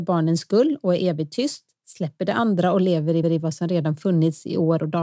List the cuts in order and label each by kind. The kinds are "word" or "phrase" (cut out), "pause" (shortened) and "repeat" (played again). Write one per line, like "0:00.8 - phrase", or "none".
0:03.2 - repeat